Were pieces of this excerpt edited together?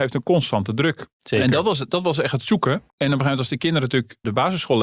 yes; 2 cuts; at 1.1 s, 2.9 s

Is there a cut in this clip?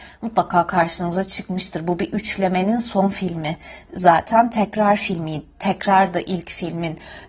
no; 0 cuts

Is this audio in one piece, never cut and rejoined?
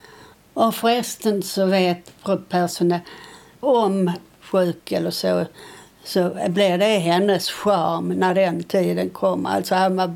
no; 1 cut; at 4.3 s

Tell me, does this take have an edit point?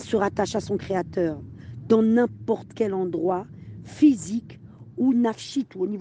no; 0 cuts

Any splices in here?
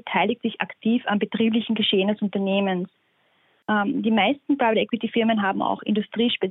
no; 0 cuts

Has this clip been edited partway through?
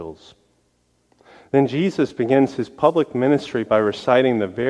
no; 0 cuts

